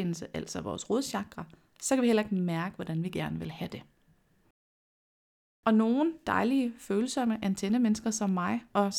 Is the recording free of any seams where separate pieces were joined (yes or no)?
yes